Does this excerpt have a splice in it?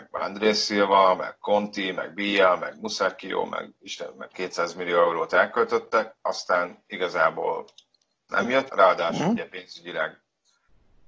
yes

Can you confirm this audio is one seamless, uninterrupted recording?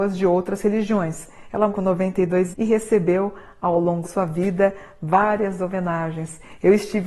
no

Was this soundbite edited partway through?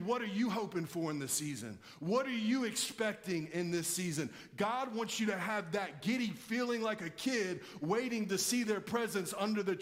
no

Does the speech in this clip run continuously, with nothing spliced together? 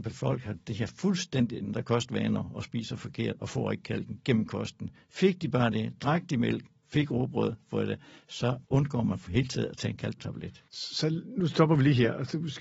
no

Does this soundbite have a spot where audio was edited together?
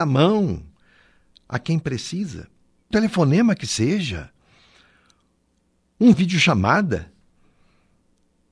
yes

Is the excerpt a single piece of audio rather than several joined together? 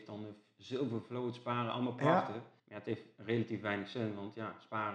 no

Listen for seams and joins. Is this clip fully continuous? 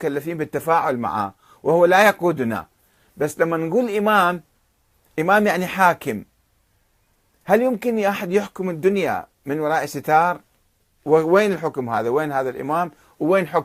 yes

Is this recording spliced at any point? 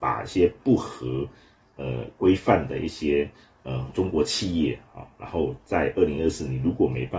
no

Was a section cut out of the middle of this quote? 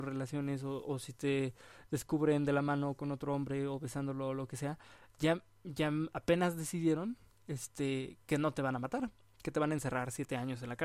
no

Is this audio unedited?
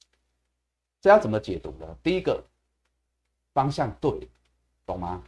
yes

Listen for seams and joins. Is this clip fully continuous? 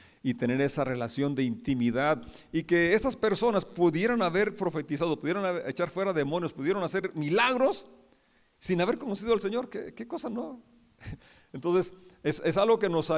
yes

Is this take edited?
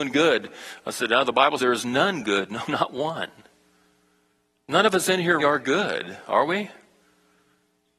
yes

